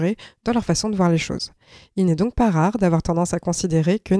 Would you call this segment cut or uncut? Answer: uncut